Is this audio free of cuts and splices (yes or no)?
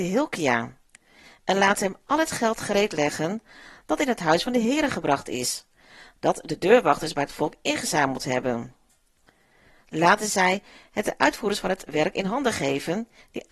yes